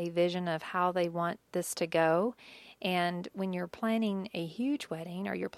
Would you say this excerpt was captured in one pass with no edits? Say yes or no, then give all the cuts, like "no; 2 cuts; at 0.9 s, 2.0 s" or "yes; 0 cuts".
yes; 0 cuts